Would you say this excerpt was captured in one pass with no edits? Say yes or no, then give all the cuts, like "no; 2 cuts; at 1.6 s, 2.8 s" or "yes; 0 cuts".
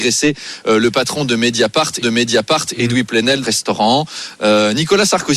no; 2 cuts; at 2.0 s, 3.4 s